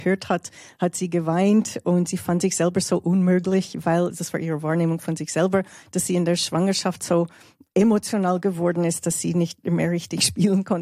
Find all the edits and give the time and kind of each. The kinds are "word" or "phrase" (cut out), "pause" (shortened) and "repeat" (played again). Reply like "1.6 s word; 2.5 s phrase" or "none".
none